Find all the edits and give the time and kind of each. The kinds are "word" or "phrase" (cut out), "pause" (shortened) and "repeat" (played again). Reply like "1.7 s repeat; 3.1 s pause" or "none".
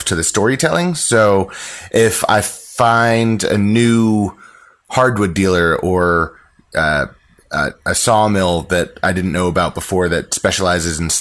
none